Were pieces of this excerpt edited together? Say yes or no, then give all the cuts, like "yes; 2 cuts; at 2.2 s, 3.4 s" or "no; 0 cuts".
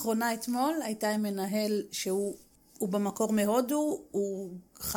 no; 0 cuts